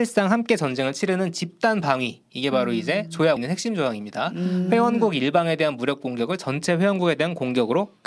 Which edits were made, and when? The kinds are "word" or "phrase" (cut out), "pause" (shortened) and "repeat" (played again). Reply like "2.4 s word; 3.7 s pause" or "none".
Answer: 3.4 s word